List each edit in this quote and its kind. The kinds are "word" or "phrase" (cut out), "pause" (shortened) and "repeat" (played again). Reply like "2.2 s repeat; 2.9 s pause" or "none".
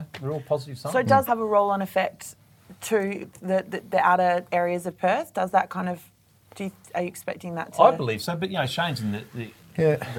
1.3 s word